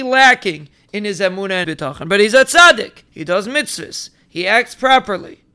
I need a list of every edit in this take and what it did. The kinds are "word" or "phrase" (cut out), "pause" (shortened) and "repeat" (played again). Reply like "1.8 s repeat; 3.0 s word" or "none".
1.6 s word; 3.1 s pause